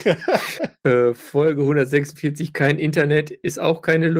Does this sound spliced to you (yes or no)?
no